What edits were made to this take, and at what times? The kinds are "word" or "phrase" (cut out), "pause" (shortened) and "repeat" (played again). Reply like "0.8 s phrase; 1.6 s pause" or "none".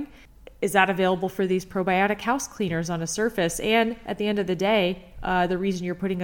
none